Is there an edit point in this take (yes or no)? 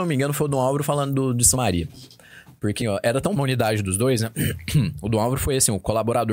yes